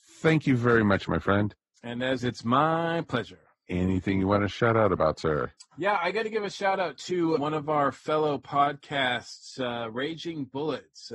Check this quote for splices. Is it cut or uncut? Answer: cut